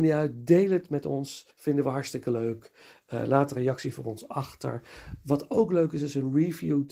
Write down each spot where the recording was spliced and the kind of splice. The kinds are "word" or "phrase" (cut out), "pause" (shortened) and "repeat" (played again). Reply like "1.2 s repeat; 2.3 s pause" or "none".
1.5 s pause